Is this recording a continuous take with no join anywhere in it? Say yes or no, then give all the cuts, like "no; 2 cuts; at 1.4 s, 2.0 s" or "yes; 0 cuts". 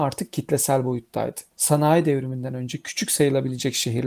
no; 1 cut; at 1.5 s